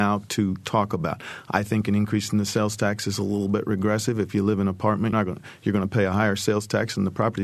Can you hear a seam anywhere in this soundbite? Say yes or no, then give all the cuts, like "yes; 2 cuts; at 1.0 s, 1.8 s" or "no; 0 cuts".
yes; 1 cut; at 5.1 s